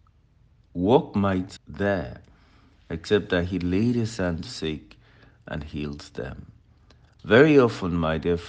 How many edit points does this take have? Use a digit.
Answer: 2